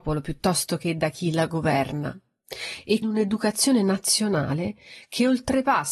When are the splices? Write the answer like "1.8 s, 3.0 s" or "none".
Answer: 3.0 s